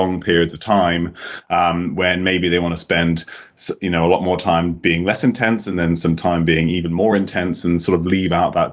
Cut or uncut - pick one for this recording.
uncut